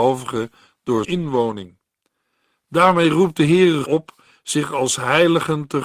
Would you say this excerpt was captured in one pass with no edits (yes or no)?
no